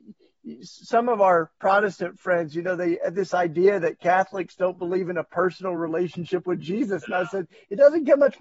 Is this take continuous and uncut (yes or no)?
yes